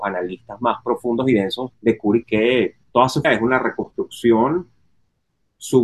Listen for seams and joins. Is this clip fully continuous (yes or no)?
no